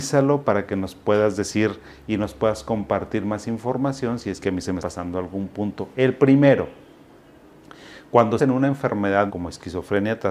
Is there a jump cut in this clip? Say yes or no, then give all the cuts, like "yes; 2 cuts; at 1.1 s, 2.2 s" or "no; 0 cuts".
yes; 3 cuts; at 4.8 s, 8.4 s, 9.3 s